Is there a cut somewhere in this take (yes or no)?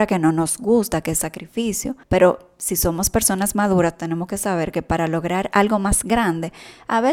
yes